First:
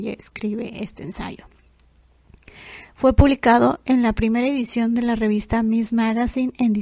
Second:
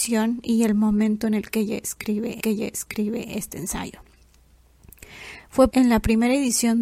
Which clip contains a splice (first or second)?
second